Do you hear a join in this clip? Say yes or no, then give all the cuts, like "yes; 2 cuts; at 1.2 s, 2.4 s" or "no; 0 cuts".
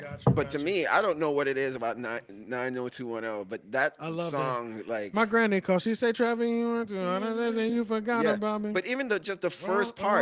no; 0 cuts